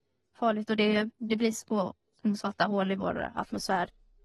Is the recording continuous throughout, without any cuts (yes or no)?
yes